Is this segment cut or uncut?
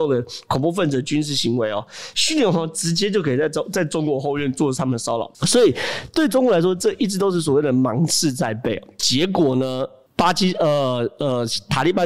cut